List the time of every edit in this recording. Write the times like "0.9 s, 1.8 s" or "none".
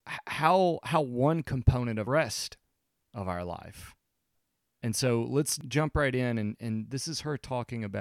2.1 s